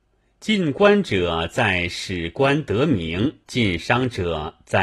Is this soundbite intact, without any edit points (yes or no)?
no